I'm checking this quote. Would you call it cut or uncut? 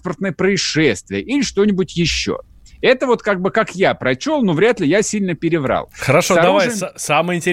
uncut